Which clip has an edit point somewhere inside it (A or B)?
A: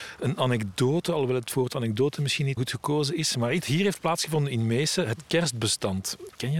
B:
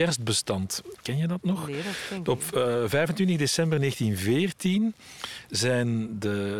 A